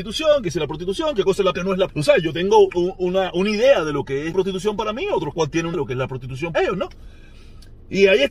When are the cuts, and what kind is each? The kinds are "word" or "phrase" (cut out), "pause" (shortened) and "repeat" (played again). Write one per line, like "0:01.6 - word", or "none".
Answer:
0:01.5 - word
0:01.9 - word
0:02.7 - word
0:03.3 - word
0:04.3 - word
0:05.3 - word
0:05.7 - word
0:06.5 - word